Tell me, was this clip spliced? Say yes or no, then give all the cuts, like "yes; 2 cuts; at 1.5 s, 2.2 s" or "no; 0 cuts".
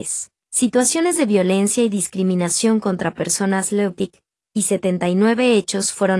no; 0 cuts